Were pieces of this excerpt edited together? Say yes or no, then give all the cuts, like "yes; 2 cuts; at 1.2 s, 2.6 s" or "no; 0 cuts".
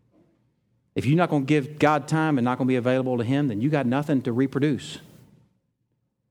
no; 0 cuts